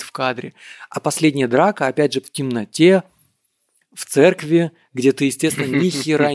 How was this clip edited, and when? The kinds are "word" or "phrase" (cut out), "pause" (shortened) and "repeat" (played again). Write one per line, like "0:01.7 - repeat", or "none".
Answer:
0:02.2 - word